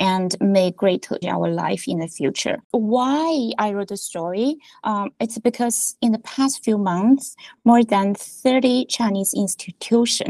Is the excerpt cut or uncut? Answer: cut